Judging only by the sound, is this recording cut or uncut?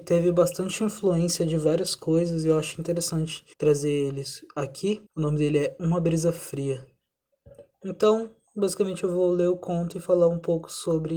cut